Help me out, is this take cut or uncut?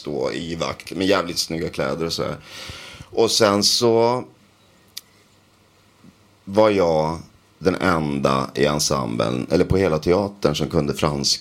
uncut